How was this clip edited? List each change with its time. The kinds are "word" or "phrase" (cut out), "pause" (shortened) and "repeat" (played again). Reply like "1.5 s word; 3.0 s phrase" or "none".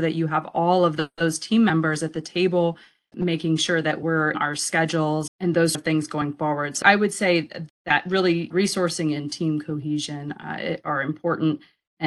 3.1 s word; 4.3 s word; 5.3 s word; 5.7 s word; 6.8 s word; 8.5 s word